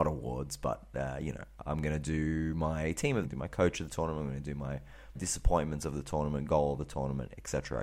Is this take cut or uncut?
cut